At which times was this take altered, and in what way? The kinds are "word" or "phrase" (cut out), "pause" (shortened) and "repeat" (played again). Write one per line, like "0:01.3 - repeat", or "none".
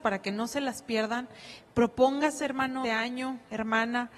0:02.8 - word